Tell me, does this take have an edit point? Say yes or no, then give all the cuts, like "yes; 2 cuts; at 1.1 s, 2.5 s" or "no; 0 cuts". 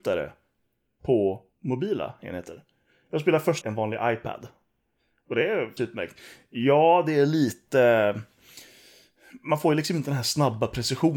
yes; 3 cuts; at 1.5 s, 3.6 s, 5.8 s